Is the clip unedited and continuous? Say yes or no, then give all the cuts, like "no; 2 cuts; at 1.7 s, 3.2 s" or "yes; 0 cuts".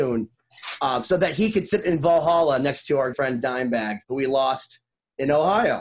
no; 2 cuts; at 3.1 s, 4.0 s